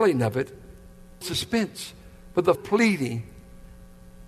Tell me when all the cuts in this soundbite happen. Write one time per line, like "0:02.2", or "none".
0:01.2
0:02.6